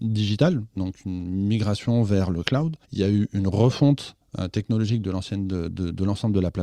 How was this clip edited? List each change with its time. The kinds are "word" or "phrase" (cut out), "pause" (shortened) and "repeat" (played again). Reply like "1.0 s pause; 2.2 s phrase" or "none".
2.8 s pause